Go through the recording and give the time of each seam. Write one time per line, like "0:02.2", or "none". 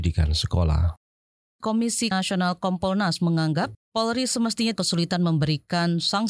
0:02.1
0:03.8
0:04.8